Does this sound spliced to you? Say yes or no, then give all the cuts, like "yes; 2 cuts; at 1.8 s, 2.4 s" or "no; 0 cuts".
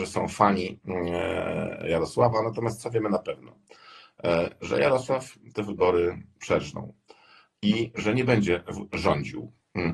no; 0 cuts